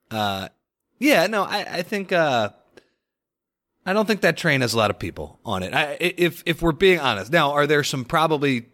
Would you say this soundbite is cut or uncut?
uncut